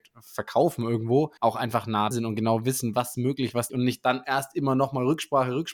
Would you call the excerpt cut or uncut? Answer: cut